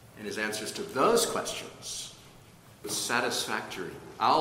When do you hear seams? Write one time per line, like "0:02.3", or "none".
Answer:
0:02.8